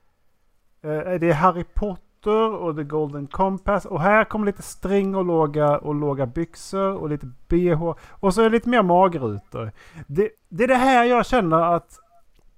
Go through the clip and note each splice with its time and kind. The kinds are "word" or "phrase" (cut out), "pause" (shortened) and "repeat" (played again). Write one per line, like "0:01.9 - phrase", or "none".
0:10.3 - pause